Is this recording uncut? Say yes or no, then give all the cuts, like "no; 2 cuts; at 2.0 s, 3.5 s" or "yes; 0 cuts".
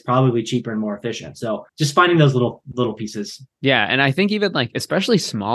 no; 2 cuts; at 1.7 s, 3.5 s